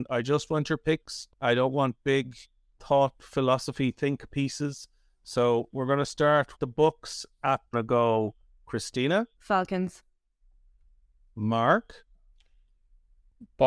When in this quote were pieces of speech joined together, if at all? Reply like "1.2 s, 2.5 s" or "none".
1.3 s, 6.5 s, 7.7 s, 9.3 s